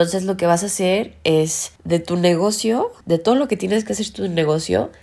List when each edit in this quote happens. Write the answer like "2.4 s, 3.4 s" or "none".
1.8 s, 3.0 s